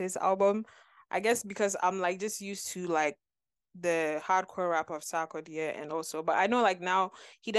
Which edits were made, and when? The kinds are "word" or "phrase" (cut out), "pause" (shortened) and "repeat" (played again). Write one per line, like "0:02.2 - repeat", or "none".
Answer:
none